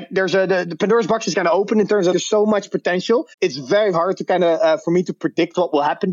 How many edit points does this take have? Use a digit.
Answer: 3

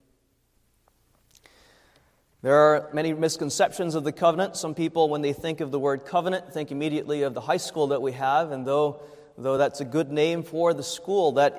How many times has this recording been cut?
0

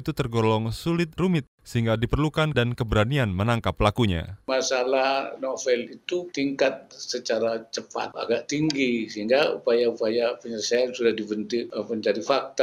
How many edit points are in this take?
7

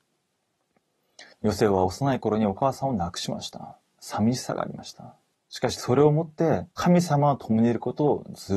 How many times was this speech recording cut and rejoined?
3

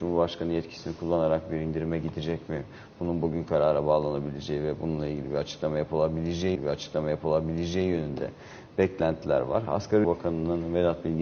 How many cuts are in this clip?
2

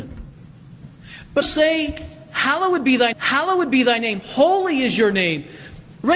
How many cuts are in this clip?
2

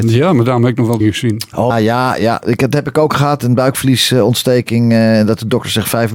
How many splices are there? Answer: 3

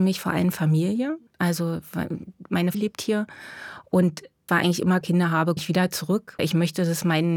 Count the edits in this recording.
6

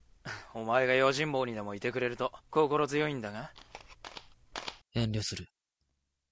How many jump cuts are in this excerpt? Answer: 2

